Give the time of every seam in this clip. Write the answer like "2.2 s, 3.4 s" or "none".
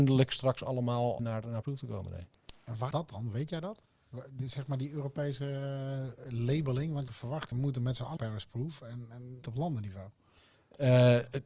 1.2 s, 1.6 s, 2.9 s, 7.1 s, 7.5 s, 8.2 s, 9.4 s